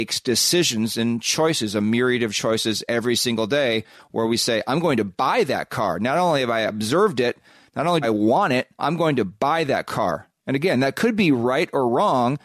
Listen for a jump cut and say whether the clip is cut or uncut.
cut